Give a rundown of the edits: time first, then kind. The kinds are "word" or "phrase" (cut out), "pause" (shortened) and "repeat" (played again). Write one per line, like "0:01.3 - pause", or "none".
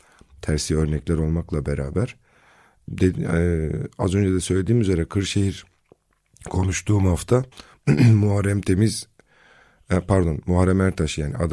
0:07.5 - pause